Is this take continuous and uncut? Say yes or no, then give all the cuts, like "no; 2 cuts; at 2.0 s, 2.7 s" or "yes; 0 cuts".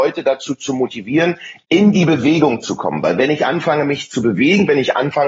yes; 0 cuts